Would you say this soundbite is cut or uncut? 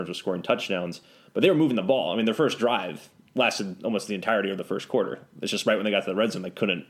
uncut